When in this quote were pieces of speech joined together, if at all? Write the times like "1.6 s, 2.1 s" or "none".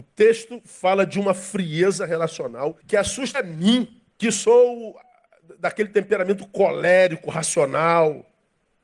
2.8 s, 3.3 s, 4.1 s